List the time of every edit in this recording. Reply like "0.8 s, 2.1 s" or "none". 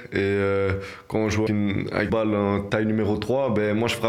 1.5 s, 2.1 s, 2.7 s